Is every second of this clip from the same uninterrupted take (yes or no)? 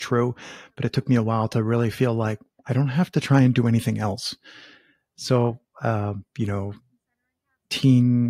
yes